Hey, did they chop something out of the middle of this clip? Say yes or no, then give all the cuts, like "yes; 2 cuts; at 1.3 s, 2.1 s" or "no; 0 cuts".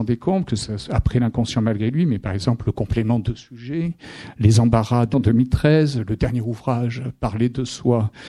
yes; 1 cut; at 5.1 s